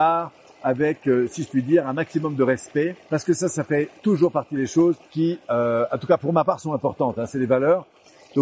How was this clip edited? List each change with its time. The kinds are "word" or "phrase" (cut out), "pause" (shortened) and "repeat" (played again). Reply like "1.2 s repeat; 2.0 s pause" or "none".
3.0 s pause; 4.0 s pause; 5.0 s pause

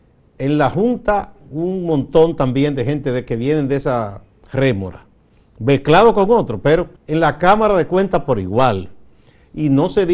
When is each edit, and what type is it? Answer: 7.0 s pause

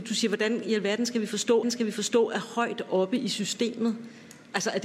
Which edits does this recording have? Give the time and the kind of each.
1.6 s repeat

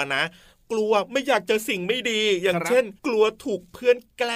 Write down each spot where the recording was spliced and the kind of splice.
3.0 s pause

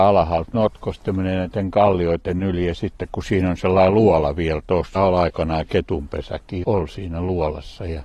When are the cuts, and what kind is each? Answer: 5.0 s word; 6.6 s word

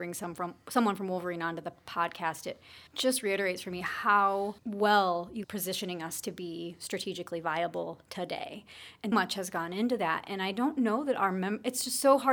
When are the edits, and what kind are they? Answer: 2.9 s pause; 4.6 s pause; 5.4 s phrase; 9.1 s word

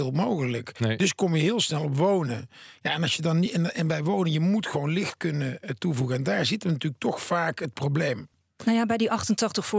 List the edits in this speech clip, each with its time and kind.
none

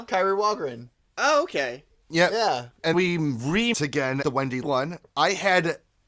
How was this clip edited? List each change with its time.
2.9 s word; 3.7 s word; 4.2 s word; 4.6 s word

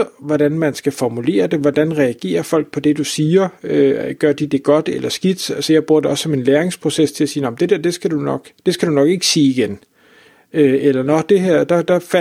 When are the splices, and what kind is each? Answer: none

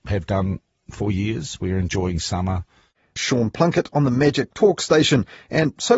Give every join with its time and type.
none

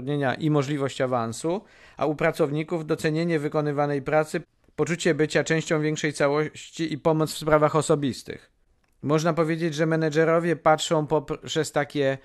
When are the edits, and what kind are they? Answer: none

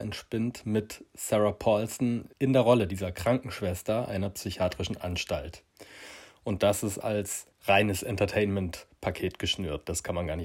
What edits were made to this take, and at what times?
2.3 s pause; 7.5 s pause

